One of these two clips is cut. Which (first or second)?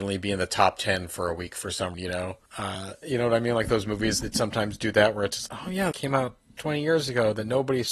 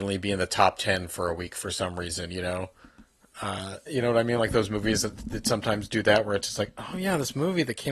first